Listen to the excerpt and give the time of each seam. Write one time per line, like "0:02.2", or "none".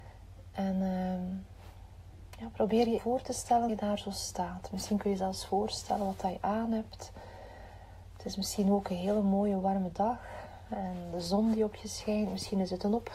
0:03.0
0:03.7